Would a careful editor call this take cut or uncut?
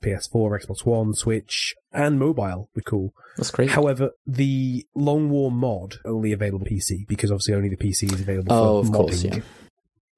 cut